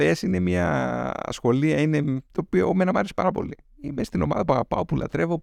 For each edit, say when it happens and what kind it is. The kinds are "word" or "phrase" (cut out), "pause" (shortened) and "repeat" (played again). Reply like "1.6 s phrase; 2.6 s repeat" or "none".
2.3 s pause